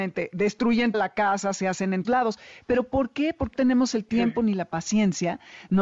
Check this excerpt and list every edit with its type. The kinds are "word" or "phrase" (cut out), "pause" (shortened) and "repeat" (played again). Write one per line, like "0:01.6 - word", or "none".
0:00.9 - word
0:02.0 - word
0:03.5 - word